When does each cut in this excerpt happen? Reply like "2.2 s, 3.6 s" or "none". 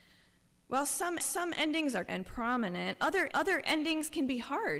1.2 s, 2.1 s, 3.3 s